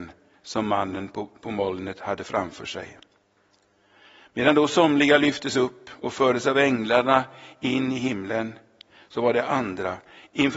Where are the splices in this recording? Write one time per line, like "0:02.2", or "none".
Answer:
none